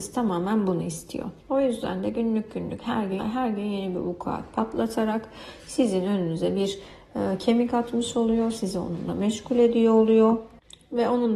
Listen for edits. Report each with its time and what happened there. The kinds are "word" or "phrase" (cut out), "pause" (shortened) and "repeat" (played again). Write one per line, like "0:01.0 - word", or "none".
0:01.4 - pause
0:03.2 - phrase